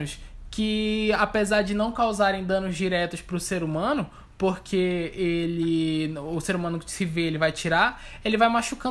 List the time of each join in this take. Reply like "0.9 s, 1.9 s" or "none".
none